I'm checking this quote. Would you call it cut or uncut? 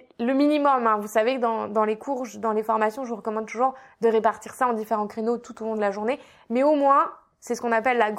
uncut